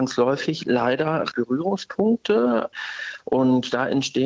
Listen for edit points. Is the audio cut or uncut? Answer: cut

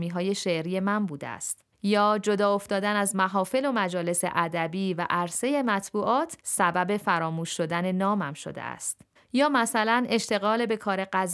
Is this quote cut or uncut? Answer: cut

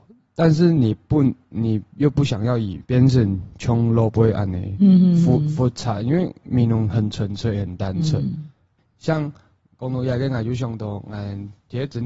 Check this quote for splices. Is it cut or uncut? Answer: cut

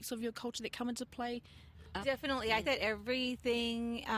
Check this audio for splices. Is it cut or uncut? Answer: cut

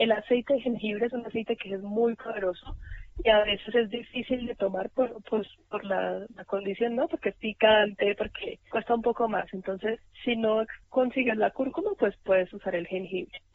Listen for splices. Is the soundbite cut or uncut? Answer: cut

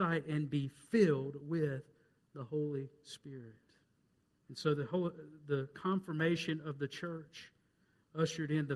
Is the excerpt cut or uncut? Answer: cut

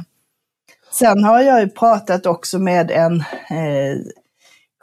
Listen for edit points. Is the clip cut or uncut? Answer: uncut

